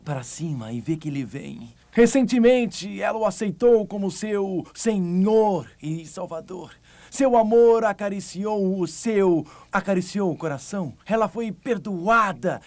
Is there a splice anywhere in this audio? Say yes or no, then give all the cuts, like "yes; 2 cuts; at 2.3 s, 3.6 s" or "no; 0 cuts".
yes; 3 cuts; at 1.8 s, 9.7 s, 11.0 s